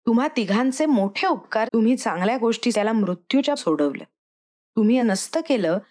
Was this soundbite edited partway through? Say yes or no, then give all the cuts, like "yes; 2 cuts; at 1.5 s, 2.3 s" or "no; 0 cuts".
yes; 4 cuts; at 1.7 s, 2.7 s, 3.6 s, 5.0 s